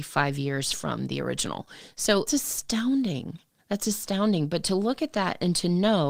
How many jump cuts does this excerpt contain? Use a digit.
2